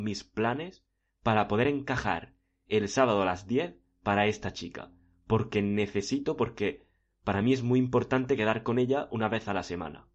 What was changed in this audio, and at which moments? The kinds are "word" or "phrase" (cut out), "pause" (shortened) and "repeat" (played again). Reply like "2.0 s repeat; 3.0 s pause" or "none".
none